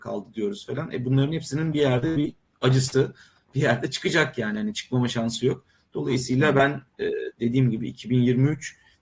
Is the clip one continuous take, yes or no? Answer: yes